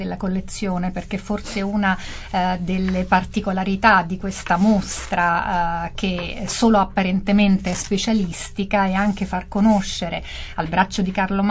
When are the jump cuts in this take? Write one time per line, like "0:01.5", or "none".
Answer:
none